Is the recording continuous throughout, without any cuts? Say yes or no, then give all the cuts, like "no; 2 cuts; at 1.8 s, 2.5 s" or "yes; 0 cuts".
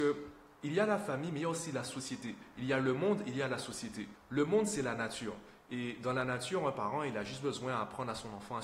yes; 0 cuts